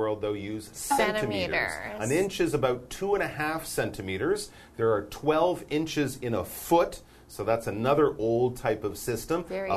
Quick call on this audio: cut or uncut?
uncut